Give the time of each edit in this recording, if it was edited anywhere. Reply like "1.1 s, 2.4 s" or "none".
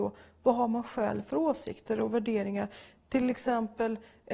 none

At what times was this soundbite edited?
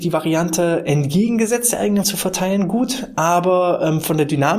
2.0 s

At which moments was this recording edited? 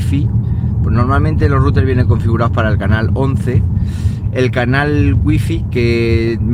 none

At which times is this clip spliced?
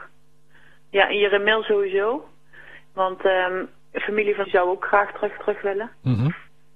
4.4 s, 5.4 s

